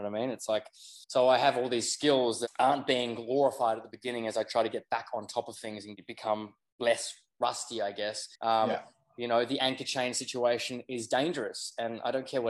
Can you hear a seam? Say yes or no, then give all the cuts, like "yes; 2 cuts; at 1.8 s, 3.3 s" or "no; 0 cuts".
yes; 2 cuts; at 1.0 s, 8.3 s